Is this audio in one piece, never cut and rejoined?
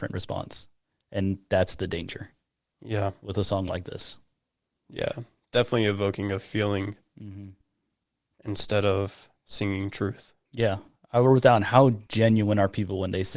yes; 0 cuts

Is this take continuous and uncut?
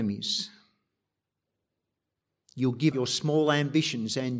no; 1 cut; at 2.9 s

